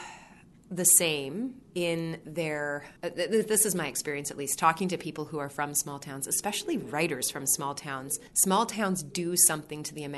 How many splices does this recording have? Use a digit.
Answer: 3